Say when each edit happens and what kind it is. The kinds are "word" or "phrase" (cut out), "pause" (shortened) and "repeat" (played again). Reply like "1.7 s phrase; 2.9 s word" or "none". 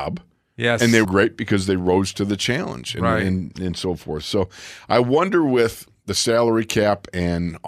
1.0 s word